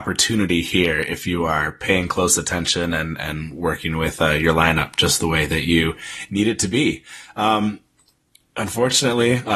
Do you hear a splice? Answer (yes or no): no